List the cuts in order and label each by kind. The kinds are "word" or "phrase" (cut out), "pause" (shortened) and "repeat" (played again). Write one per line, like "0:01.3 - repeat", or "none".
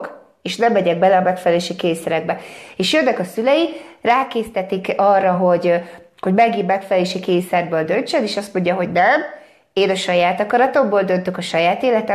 none